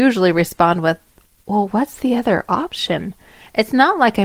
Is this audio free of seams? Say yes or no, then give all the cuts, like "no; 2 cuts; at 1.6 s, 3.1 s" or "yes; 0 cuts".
yes; 0 cuts